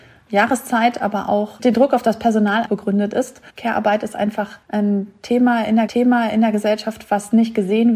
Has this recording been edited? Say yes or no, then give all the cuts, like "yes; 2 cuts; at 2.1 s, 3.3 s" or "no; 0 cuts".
yes; 4 cuts; at 2.6 s, 3.5 s, 4.6 s, 5.9 s